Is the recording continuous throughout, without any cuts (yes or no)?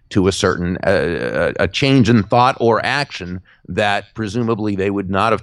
yes